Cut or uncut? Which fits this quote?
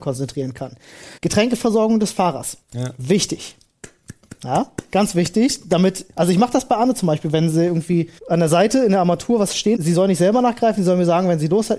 cut